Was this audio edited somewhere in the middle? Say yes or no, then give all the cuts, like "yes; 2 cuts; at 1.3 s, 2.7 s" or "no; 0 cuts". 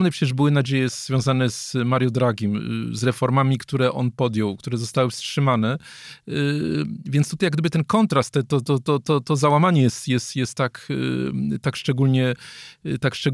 no; 0 cuts